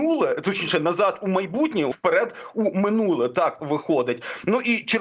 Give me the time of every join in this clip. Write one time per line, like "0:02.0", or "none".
0:01.9
0:03.6